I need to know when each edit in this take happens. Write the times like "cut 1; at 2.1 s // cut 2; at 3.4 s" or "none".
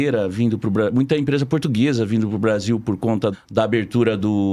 cut 1; at 3.3 s